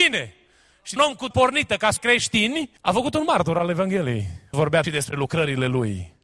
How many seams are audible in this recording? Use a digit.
6